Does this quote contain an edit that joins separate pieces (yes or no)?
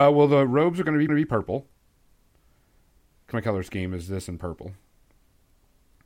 yes